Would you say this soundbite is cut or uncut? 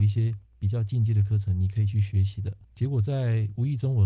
cut